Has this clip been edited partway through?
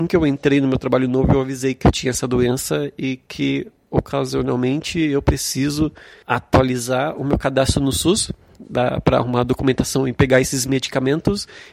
no; 0 cuts

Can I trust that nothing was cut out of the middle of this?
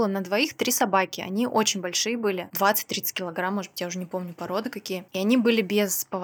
yes; 0 cuts

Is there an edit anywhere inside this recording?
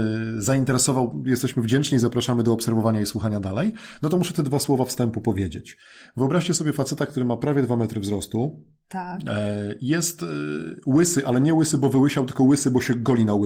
no; 0 cuts

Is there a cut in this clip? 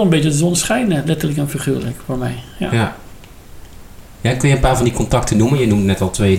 no; 0 cuts

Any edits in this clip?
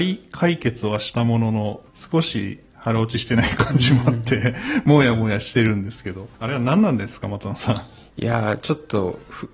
yes; 2 cuts; at 1.9 s, 6.3 s

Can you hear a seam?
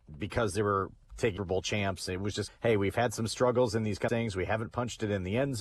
yes; 3 cuts; at 1.4 s, 2.5 s, 4.1 s

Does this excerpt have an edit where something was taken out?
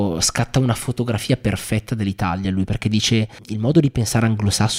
no; 0 cuts

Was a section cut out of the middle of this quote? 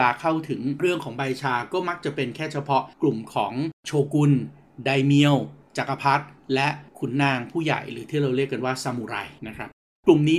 yes; 3 cuts; at 2.9 s, 6.9 s, 9.4 s

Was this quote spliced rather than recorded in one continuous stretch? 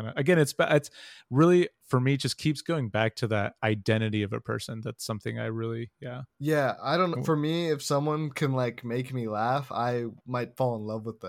yes; 1 cut; at 10.2 s

